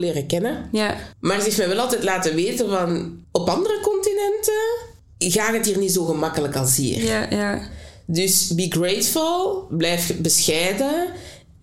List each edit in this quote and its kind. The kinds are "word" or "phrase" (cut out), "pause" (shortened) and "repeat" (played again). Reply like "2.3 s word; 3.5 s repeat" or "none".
none